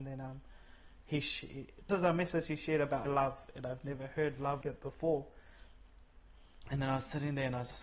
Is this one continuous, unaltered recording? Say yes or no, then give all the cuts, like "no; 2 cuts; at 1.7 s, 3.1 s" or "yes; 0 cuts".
no; 3 cuts; at 1.9 s, 3.1 s, 4.6 s